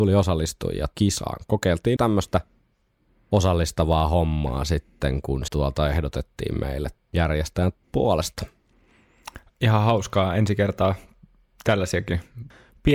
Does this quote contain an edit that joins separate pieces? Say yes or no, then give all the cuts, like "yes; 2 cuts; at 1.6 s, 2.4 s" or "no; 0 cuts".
yes; 4 cuts; at 0.9 s, 2.0 s, 5.5 s, 7.0 s